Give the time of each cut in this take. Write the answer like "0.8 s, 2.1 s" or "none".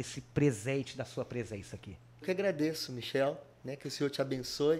2.2 s